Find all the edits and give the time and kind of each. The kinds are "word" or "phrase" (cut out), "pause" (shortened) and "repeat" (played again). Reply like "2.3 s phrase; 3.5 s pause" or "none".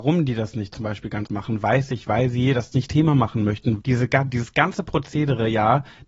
1.3 s word; 2.9 s word; 3.8 s phrase